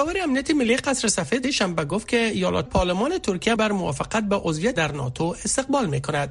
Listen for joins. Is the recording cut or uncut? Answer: cut